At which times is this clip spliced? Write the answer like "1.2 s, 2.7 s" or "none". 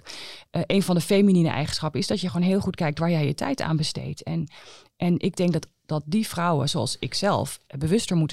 none